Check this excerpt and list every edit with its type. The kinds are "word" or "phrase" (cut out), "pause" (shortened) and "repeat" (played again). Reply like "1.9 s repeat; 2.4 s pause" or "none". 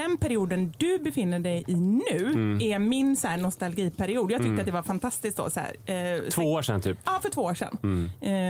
none